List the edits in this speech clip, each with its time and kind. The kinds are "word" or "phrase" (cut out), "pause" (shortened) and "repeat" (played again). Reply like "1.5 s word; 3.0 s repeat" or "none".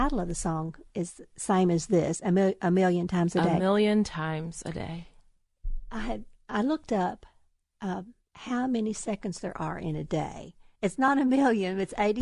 none